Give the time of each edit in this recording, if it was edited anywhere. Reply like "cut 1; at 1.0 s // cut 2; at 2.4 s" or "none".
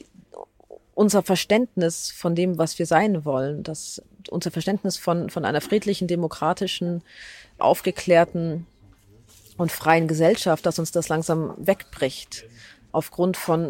none